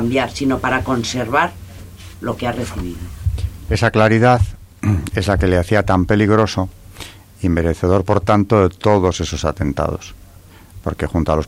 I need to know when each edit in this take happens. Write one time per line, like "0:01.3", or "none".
none